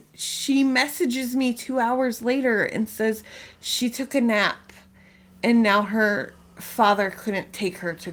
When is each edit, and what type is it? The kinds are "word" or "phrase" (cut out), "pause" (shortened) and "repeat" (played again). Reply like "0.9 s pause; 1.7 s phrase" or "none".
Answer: none